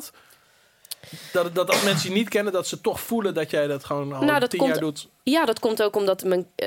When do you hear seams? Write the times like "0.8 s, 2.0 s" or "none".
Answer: none